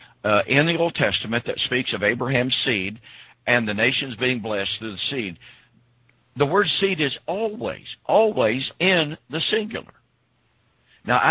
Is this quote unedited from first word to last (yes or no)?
yes